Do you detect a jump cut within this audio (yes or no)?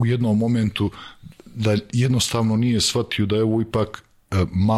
no